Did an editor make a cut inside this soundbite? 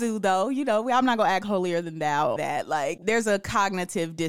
yes; 1 cut; at 2.4 s

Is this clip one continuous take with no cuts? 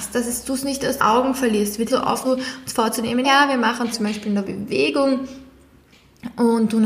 no; 6 cuts; at 1.0 s, 1.9 s, 2.2 s, 3.2 s, 3.9 s, 4.4 s

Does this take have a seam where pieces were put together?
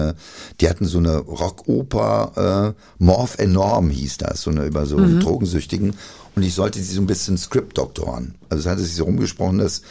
no; 0 cuts

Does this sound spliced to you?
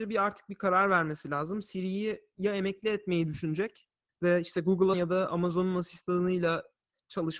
yes; 2 cuts; at 4.1 s, 4.9 s

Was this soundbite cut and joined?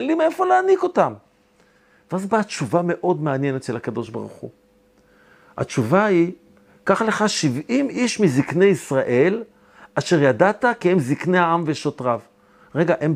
no; 0 cuts

